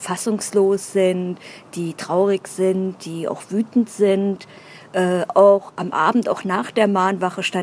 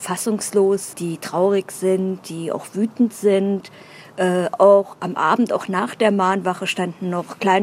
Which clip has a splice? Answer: second; 1 cut; at 0.9 s

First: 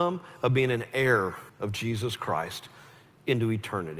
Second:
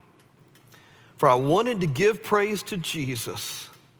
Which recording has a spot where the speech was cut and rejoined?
first; 1 cut; at 1.5 s

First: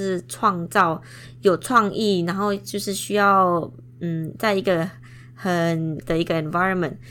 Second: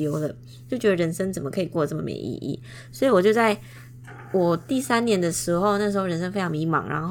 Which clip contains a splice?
first; 1 cut; at 6.0 s

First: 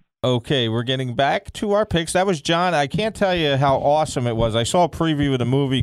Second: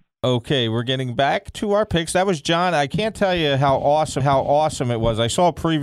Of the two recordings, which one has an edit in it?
second; 1 cut; at 4.2 s

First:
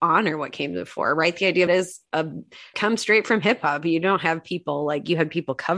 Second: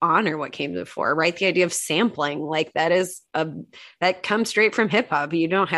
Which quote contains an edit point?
first; 2 cuts; at 1.7 s, 2.7 s

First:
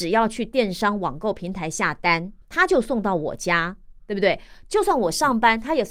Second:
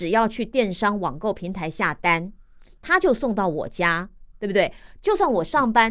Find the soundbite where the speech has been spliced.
first; 1 cut; at 2.4 s

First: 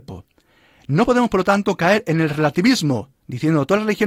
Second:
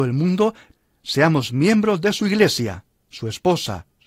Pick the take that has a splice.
first; 1 cut; at 3.2 s

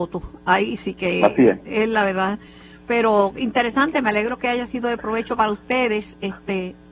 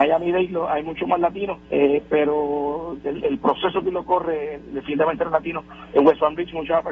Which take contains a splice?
second; 1 cut; at 1.7 s

